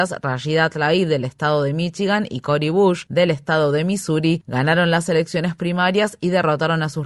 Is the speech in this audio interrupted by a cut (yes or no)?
no